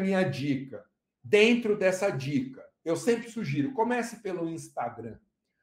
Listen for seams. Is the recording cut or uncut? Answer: uncut